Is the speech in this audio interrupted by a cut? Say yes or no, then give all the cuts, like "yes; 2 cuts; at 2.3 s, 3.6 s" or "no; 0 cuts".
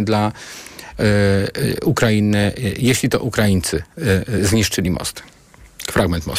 no; 0 cuts